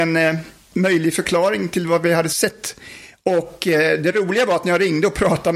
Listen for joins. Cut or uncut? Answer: uncut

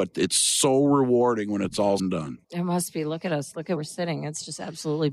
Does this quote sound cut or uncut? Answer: cut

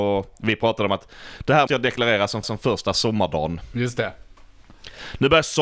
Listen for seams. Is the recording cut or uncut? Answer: cut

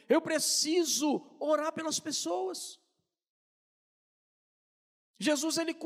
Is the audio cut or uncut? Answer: uncut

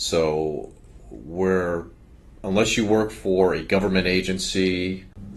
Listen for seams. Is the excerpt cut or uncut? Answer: uncut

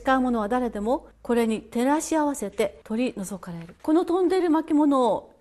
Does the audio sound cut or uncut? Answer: cut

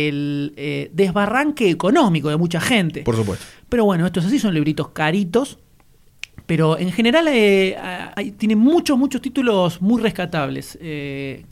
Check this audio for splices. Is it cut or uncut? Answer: cut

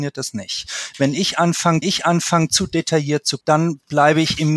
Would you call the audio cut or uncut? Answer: cut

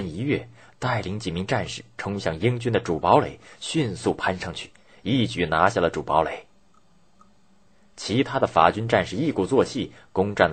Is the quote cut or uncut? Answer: uncut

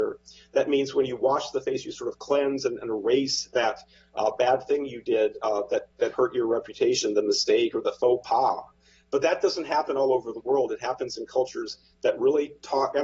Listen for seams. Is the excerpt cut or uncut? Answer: uncut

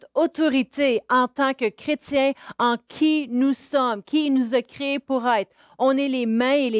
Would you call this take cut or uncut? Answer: uncut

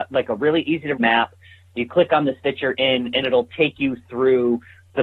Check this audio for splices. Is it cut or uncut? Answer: cut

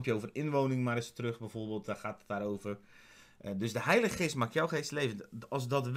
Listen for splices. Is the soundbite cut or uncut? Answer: uncut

